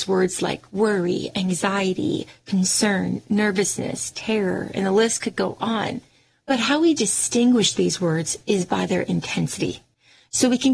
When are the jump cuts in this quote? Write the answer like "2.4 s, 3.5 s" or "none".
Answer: none